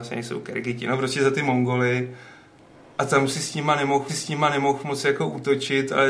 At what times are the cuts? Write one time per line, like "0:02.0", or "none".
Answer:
0:04.1